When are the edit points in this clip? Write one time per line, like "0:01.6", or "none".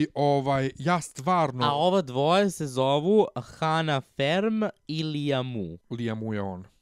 0:05.8